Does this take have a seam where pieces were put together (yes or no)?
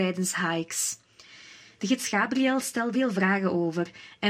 yes